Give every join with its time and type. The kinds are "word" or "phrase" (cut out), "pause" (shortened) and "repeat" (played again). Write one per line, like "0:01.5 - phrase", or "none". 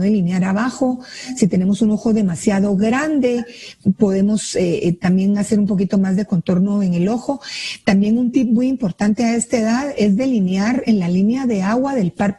0:03.8 - pause